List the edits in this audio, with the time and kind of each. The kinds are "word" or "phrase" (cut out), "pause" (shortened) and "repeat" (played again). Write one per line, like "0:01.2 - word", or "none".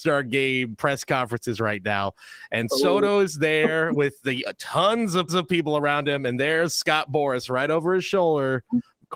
0:05.3 - repeat